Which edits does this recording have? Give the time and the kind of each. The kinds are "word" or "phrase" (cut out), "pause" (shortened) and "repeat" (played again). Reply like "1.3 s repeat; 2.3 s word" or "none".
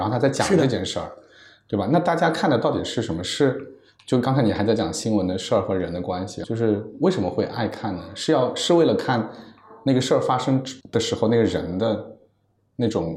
6.4 s word; 10.8 s pause